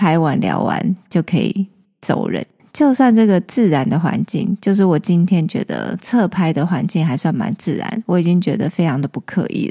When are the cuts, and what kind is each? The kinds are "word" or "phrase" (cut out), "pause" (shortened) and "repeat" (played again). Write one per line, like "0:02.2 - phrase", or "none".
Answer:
none